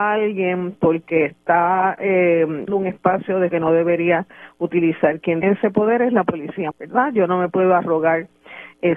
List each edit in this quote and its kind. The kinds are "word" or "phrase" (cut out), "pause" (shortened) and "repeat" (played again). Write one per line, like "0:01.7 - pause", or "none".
0:02.7 - word
0:03.5 - word
0:05.4 - word
0:06.7 - word